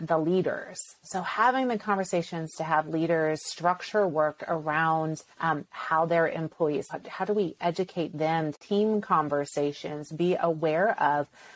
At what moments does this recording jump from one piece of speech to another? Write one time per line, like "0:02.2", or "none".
0:05.3
0:06.9
0:08.5